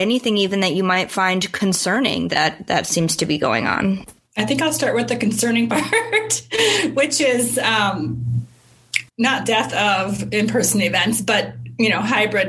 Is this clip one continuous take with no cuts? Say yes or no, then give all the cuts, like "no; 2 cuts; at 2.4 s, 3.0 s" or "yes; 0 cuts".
no; 1 cut; at 9.1 s